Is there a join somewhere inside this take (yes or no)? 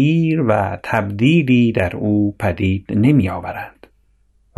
no